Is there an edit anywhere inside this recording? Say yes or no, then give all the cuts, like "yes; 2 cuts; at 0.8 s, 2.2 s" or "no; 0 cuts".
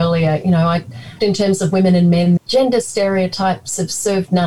yes; 2 cuts; at 1.2 s, 2.4 s